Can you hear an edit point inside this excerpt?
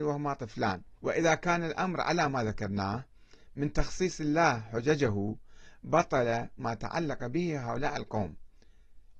yes; 1 cut; at 1.0 s

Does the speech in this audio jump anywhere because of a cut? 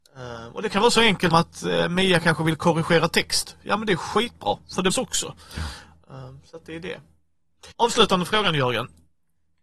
yes; 3 cuts; at 1.3 s, 4.9 s, 7.7 s

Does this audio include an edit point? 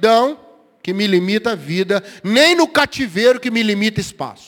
no; 0 cuts

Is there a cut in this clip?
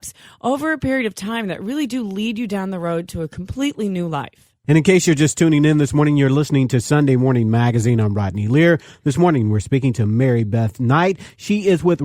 no; 0 cuts

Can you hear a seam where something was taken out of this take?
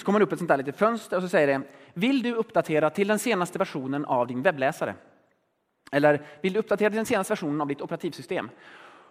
no; 0 cuts

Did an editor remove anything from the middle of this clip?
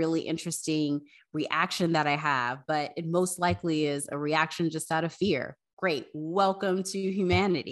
no; 0 cuts

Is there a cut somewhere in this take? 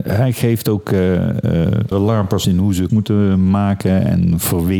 yes; 3 cuts; at 1.9 s, 2.4 s, 2.9 s

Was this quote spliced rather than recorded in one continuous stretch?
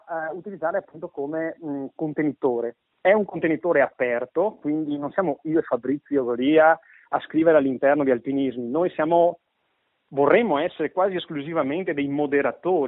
no; 0 cuts

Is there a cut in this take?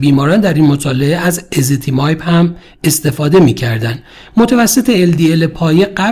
no; 0 cuts

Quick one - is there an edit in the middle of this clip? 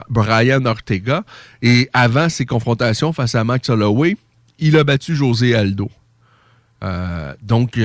no; 0 cuts

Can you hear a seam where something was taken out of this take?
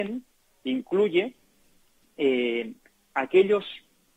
no; 0 cuts

